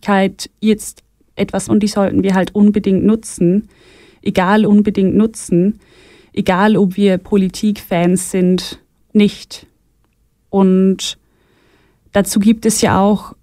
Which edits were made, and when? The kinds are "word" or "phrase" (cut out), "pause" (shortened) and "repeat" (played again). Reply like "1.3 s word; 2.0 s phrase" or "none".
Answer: 1.7 s word; 4.6 s repeat; 9.1 s word